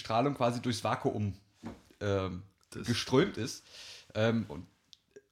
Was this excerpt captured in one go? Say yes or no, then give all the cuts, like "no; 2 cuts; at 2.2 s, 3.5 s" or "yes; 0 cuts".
no; 1 cut; at 2.7 s